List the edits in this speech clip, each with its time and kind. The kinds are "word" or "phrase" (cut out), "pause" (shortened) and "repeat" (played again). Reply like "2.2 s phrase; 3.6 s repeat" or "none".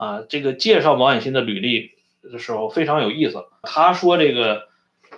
3.6 s word